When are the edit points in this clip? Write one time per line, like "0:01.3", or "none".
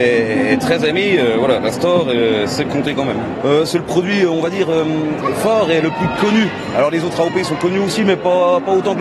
none

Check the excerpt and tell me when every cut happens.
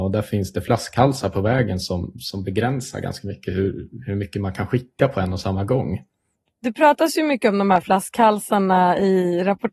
0:06.3

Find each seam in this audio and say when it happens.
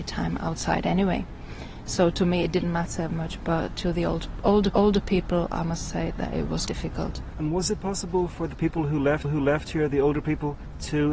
0:03.1
0:04.7
0:06.2
0:06.7
0:09.2

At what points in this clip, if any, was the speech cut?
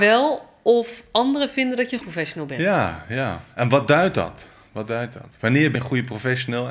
0:02.0
0:05.8

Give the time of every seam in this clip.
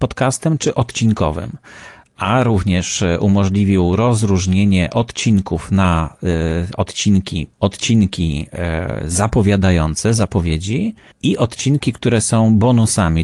0:07.5
0:11.1

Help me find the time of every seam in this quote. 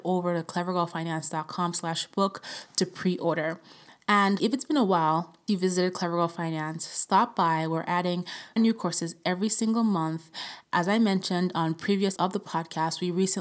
0:04.4
0:05.5
0:08.6
0:10.6
0:12.2

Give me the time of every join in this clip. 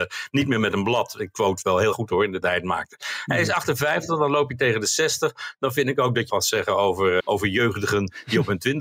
0:01.3
0:01.9
0:02.4
0:06.3
0:07.2

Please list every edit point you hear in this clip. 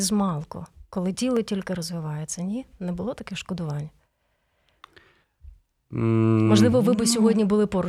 none

